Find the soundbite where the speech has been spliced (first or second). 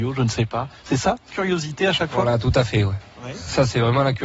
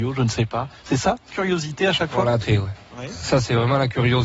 second